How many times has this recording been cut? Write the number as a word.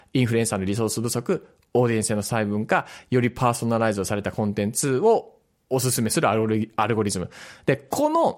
zero